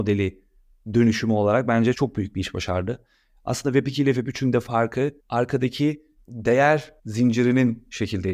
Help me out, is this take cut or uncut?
cut